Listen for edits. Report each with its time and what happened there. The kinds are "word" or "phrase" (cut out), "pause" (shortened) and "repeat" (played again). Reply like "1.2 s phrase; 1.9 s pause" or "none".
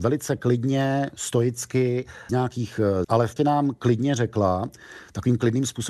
2.3 s word; 3.0 s phrase; 3.4 s word